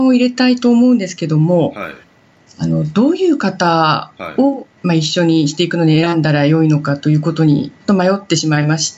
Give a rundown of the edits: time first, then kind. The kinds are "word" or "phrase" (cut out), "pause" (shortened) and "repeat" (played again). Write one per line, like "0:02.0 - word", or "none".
0:04.8 - pause